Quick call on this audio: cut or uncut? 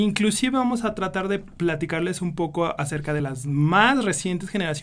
uncut